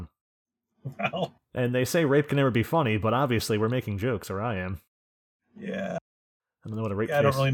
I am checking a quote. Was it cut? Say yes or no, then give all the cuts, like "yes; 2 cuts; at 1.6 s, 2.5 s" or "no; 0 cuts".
no; 0 cuts